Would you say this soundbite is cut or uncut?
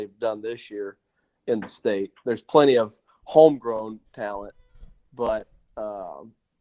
uncut